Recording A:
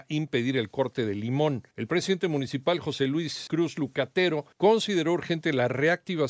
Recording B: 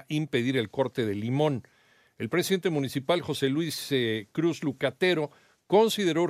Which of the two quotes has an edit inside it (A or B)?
A